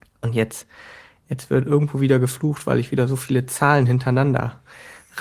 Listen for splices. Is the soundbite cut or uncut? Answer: uncut